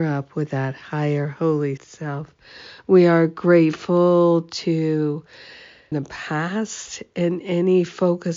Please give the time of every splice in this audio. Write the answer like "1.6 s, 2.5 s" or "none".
1.8 s, 5.9 s